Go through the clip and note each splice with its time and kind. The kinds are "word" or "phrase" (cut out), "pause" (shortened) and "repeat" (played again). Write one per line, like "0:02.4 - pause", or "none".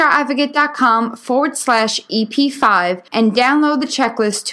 0:03.1 - pause